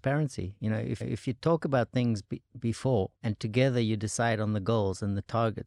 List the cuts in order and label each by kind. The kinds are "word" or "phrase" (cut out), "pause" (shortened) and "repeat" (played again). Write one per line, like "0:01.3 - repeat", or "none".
0:01.0 - repeat
0:03.1 - pause